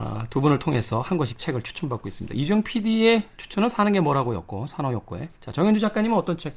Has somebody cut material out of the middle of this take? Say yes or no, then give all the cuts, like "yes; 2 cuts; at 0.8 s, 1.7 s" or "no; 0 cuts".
yes; 1 cut; at 5.3 s